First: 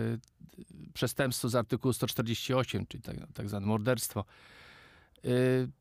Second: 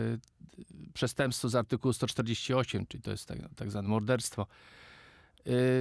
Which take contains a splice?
first; 1 cut; at 3.0 s

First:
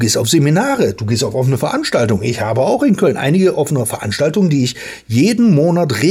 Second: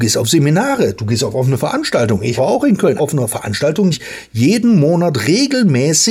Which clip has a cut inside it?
second; 3 cuts; at 2.4 s, 3.0 s, 3.9 s

